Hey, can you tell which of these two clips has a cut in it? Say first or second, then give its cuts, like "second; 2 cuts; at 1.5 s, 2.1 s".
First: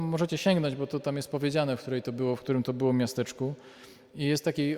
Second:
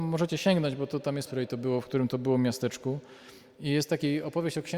second; 1 cut; at 1.3 s